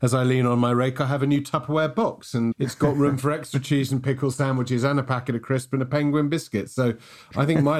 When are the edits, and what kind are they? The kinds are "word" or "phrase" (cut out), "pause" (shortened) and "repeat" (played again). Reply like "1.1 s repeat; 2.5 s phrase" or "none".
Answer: 2.5 s word